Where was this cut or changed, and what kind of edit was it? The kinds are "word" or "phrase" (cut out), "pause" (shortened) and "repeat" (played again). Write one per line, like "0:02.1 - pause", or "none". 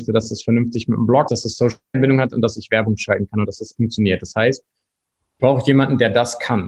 0:01.3 - word
0:01.9 - word
0:03.8 - word
0:05.4 - word